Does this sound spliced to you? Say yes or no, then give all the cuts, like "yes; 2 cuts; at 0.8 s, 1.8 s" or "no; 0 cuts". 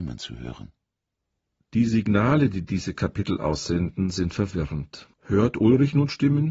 yes; 1 cut; at 5.1 s